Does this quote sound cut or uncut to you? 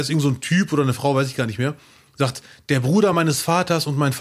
uncut